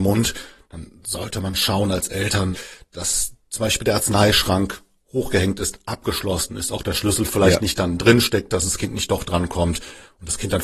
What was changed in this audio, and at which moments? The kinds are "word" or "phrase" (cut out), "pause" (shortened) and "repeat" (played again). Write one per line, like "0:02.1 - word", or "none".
0:01.5 - word